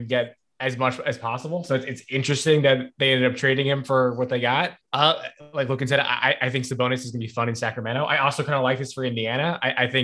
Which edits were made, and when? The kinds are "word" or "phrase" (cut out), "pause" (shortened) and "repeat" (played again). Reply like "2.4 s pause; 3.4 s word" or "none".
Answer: 4.8 s pause